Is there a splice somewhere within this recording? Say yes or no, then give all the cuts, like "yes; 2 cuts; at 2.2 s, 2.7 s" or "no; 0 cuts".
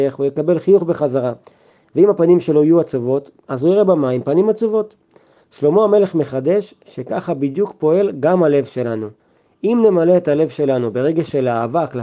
no; 0 cuts